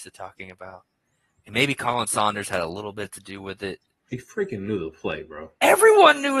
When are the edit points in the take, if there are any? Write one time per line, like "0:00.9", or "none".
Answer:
none